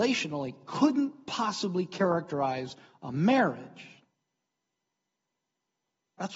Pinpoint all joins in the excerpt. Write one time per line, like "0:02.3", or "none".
none